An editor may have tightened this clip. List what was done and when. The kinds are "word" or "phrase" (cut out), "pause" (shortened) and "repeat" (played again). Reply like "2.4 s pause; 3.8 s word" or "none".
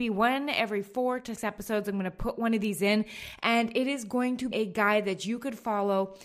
1.4 s word; 4.5 s word